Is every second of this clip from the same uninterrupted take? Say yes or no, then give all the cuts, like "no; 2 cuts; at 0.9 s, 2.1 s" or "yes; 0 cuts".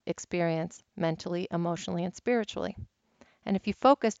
yes; 0 cuts